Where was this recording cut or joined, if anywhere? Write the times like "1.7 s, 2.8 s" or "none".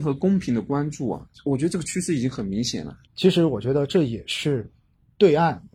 1.3 s, 3.0 s